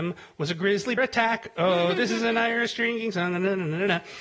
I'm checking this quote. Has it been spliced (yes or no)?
yes